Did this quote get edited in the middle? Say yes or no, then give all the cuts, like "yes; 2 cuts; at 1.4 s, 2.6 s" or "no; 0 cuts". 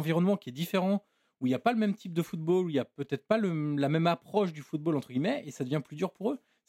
no; 0 cuts